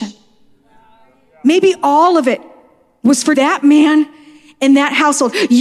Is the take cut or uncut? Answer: cut